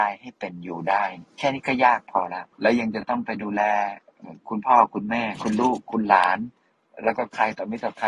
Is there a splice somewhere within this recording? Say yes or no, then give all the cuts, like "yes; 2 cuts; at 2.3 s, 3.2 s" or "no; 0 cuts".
yes; 4 cuts; at 1.3 s, 2.5 s, 4.4 s, 6.7 s